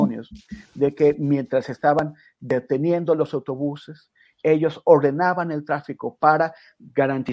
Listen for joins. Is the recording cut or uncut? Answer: uncut